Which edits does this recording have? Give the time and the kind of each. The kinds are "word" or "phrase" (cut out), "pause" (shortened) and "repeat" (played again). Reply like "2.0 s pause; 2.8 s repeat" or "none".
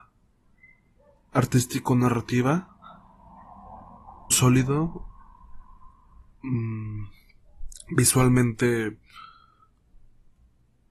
4.3 s phrase